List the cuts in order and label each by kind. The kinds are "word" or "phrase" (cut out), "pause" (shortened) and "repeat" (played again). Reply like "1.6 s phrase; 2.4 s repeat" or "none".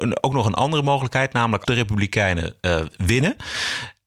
1.6 s word